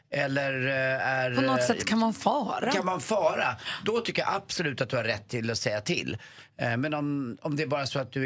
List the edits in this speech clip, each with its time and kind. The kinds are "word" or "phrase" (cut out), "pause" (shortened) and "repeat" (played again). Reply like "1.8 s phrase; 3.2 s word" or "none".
none